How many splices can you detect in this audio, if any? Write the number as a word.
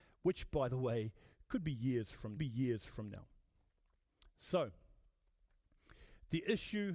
one